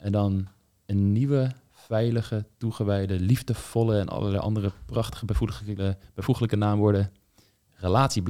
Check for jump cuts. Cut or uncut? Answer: uncut